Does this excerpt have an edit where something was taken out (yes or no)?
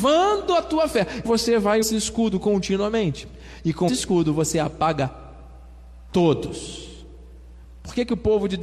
yes